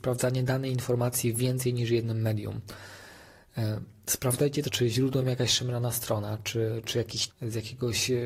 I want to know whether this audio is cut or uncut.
cut